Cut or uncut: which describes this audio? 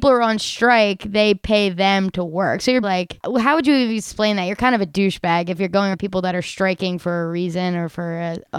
cut